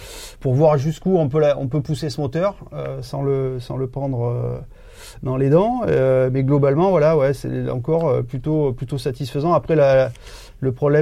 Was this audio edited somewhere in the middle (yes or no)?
no